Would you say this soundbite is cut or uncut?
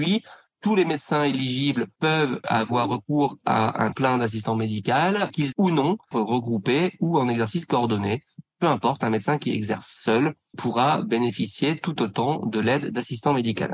cut